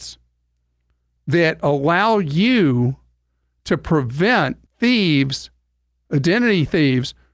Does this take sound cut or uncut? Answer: cut